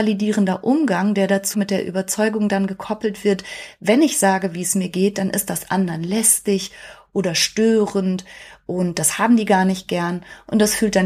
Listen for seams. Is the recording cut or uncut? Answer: cut